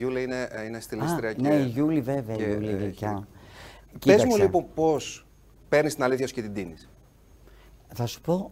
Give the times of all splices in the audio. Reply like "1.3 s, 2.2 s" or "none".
none